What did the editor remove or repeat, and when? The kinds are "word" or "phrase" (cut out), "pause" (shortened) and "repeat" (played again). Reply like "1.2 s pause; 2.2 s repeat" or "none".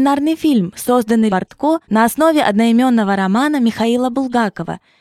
1.3 s phrase; 1.8 s pause